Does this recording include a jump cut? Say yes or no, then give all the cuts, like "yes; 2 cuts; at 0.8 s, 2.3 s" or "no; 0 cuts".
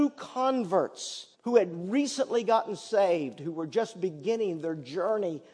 yes; 1 cut; at 1.3 s